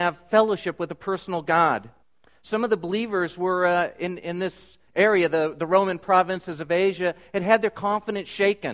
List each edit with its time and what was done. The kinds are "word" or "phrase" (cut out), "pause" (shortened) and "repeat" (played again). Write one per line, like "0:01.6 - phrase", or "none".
0:02.0 - pause
0:04.9 - pause